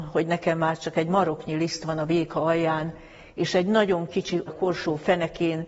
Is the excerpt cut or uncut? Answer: cut